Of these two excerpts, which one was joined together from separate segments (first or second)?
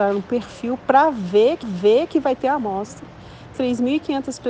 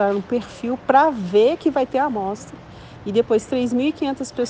first